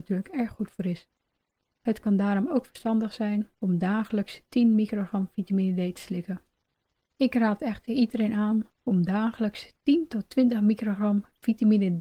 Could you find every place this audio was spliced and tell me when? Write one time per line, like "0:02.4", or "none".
none